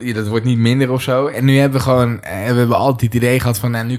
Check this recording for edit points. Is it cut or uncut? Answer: uncut